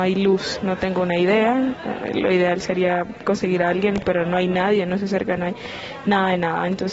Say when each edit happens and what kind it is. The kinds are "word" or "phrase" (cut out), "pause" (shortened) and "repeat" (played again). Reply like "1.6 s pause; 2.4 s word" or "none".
5.4 s word